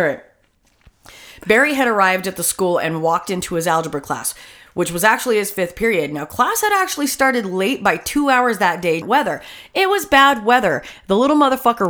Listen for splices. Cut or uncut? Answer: cut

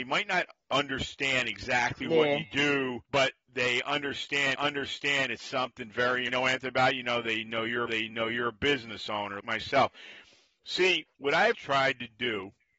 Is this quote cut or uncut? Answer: cut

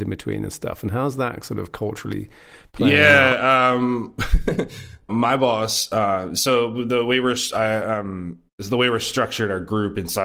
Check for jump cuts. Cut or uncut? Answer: cut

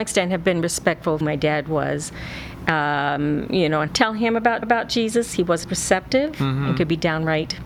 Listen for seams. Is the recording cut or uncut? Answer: cut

